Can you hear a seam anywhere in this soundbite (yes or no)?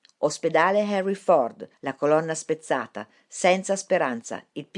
yes